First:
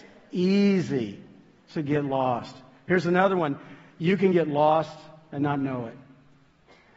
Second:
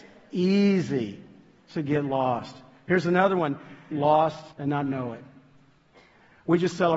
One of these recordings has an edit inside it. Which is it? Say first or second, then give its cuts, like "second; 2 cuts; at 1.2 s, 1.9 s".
second; 2 cuts; at 3.9 s, 4.5 s